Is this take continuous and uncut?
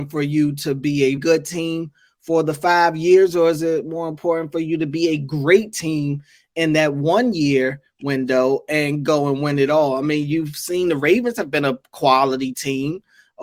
no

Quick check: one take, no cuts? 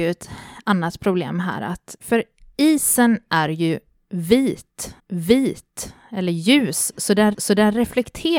no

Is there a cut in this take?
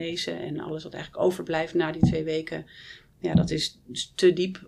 no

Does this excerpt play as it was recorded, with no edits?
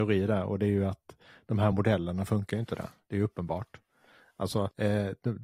yes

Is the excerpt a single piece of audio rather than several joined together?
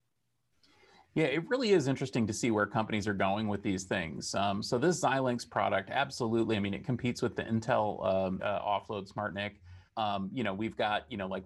no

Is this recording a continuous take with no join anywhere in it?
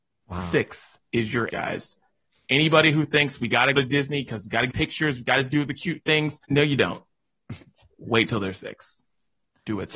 no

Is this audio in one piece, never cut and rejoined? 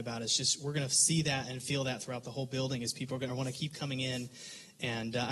yes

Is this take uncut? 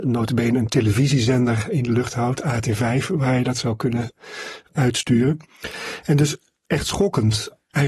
yes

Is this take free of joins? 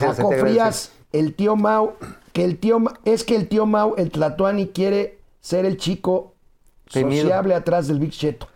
yes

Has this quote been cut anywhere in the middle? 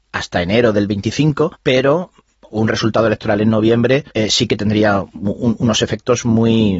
yes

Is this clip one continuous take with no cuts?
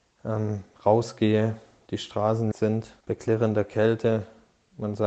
no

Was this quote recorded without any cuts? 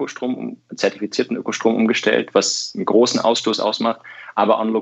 yes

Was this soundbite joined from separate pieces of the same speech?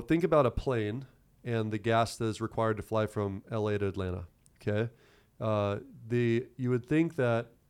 no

